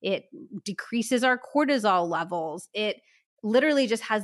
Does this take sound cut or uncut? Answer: uncut